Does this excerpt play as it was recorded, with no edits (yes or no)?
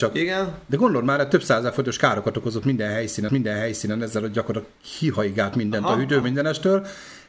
no